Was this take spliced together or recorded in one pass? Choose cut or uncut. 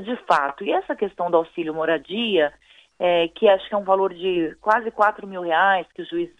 uncut